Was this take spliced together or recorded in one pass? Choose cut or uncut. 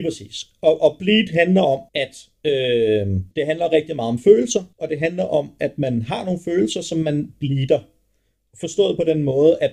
cut